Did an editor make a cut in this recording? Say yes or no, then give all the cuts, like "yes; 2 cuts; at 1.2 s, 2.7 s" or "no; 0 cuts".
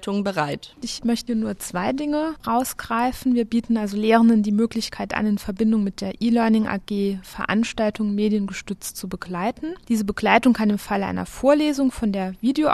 no; 0 cuts